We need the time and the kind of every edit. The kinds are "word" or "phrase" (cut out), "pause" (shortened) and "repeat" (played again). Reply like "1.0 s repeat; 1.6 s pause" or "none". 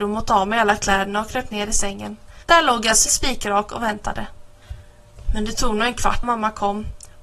2.4 s pause; 3.1 s word; 6.2 s word